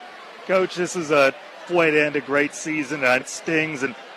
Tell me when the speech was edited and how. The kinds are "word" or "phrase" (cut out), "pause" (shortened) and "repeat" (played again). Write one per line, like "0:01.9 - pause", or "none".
0:01.7 - word
0:03.2 - word